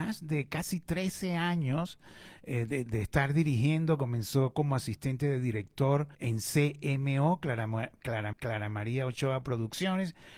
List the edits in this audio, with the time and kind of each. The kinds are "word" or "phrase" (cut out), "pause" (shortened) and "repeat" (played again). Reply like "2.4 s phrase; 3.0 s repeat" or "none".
2.9 s word; 6.1 s pause; 8.3 s repeat